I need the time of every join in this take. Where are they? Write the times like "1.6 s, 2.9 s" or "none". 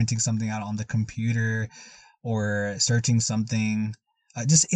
none